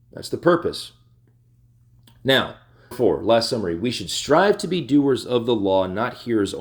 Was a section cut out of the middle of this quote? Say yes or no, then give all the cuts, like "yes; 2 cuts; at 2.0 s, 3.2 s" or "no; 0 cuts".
yes; 1 cut; at 2.9 s